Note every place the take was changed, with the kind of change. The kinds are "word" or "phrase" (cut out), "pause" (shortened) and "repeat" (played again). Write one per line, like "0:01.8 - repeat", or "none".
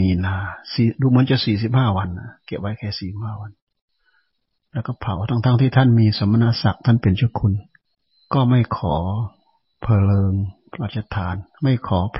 0:07.9 - pause